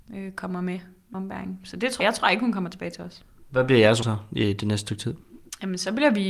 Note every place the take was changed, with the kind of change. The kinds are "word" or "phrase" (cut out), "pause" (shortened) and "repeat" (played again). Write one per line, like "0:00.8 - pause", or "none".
0:01.1 - word
0:02.0 - word
0:04.0 - word